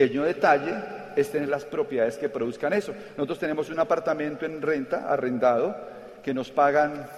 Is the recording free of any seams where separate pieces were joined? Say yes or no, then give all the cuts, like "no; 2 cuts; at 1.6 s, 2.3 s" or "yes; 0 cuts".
yes; 0 cuts